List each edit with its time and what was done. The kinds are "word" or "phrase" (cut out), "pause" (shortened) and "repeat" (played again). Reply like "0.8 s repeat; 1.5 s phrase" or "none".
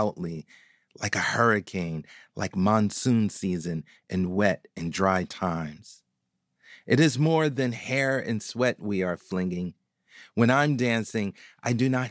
none